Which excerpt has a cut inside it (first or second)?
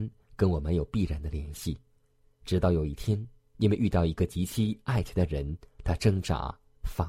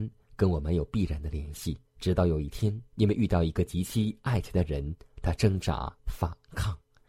second